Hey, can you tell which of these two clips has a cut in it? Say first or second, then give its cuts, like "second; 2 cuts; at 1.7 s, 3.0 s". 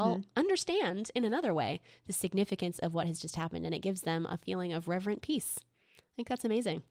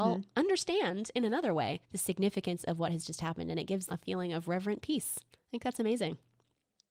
second; 3 cuts; at 1.8 s, 3.9 s, 5.3 s